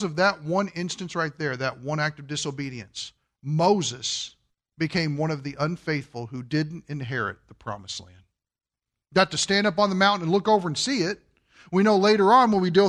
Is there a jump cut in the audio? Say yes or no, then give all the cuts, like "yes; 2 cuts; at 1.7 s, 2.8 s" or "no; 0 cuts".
no; 0 cuts